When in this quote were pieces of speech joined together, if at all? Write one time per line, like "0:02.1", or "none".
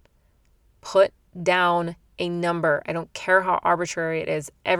none